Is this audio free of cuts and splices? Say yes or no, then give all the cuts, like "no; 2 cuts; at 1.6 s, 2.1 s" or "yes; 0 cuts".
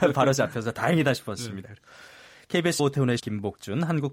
no; 2 cuts; at 2.8 s, 3.2 s